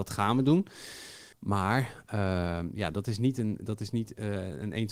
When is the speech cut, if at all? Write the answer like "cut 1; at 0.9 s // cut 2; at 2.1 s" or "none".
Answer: cut 1; at 1.3 s